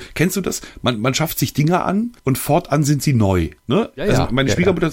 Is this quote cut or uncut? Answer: cut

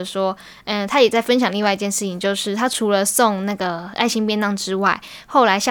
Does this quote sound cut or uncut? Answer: uncut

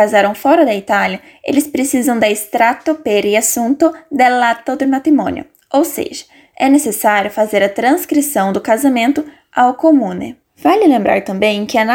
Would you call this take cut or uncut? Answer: uncut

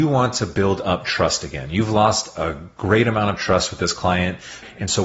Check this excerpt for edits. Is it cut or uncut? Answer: uncut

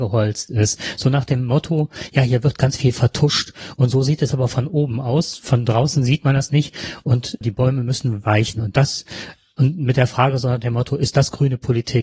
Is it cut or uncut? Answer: cut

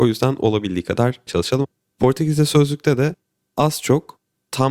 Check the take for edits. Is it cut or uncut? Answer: cut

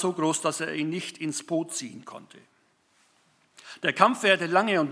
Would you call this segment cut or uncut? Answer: uncut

